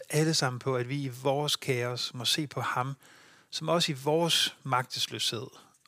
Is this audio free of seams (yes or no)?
yes